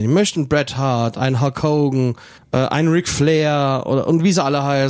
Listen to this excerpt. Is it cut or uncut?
cut